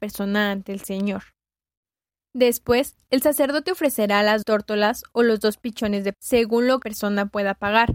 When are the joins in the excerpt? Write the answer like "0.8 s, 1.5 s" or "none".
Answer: 4.4 s, 6.1 s, 6.8 s